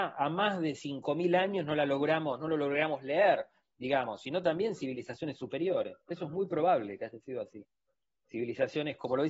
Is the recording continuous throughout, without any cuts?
no; 1 cut; at 6.0 s

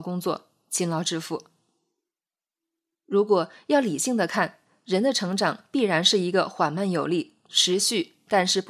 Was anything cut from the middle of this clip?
no; 0 cuts

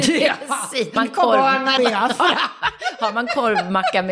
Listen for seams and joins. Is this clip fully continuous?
no; 2 cuts; at 1.0 s, 1.8 s

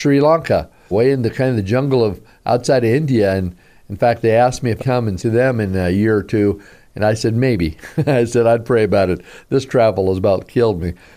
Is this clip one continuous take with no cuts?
no; 3 cuts; at 0.9 s, 4.8 s, 5.2 s

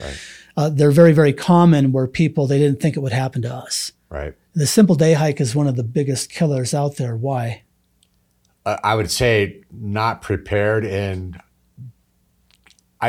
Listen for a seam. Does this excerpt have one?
no; 0 cuts

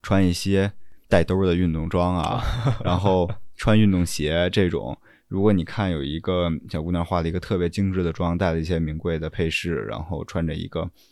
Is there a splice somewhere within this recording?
yes; 1 cut; at 1.0 s

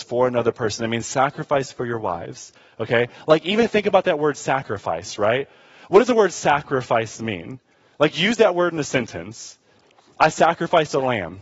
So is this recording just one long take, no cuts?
yes; 0 cuts

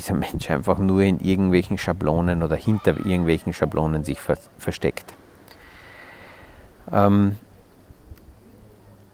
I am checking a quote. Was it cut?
no; 0 cuts

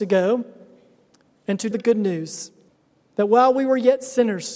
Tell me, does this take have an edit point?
yes; 2 cuts; at 1.7 s, 2.7 s

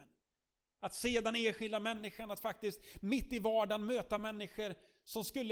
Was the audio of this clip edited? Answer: no; 0 cuts

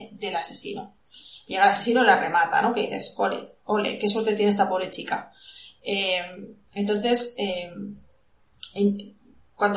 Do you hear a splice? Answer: no; 0 cuts

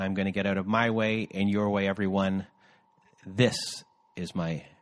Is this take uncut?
yes; 0 cuts

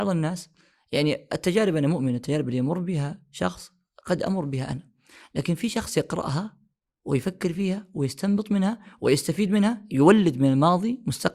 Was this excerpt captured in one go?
yes; 0 cuts

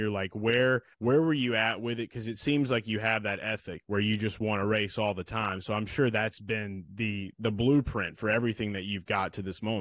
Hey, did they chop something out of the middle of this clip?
yes; 1 cut; at 0.9 s

